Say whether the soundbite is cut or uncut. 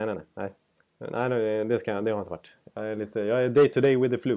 uncut